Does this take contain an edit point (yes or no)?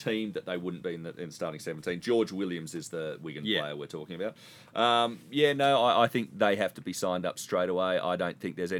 no